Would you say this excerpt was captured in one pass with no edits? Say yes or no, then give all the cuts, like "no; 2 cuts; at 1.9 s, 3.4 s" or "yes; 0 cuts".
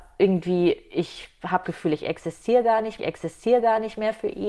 no; 2 cuts; at 1.6 s, 3.0 s